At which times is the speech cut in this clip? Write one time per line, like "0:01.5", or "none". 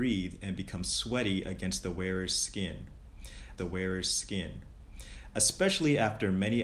0:03.6